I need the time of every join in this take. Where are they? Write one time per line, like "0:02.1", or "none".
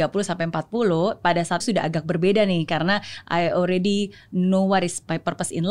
0:01.6